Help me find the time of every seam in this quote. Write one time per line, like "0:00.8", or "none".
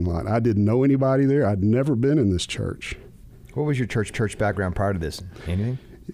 0:04.1